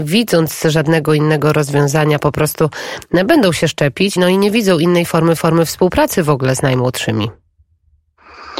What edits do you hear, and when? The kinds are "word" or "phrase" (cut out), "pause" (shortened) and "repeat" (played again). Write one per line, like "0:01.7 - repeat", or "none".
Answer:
0:04.2 - word
0:05.4 - repeat